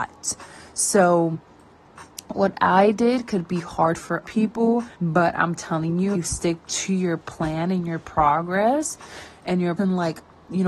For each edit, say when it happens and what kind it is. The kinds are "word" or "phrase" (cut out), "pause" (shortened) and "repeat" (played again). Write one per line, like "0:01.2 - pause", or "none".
0:04.2 - word
0:04.9 - pause
0:06.1 - word
0:09.8 - word